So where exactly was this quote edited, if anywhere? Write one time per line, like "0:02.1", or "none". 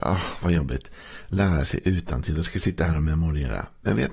none